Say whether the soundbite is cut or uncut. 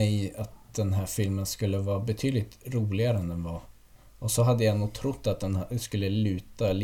uncut